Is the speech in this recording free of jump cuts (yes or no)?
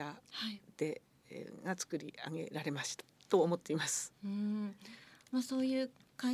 yes